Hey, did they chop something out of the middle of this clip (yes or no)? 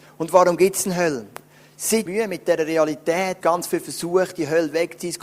yes